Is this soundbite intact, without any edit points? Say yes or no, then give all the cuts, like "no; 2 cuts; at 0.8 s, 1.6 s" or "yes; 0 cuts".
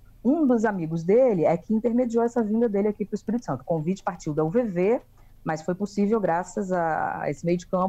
yes; 0 cuts